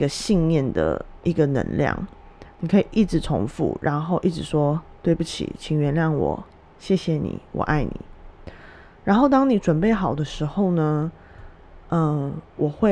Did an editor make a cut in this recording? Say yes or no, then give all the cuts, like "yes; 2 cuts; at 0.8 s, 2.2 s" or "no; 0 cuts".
no; 0 cuts